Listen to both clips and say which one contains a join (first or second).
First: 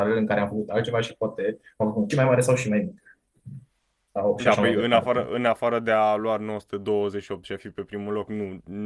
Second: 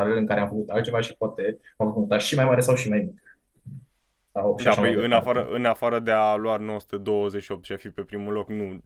first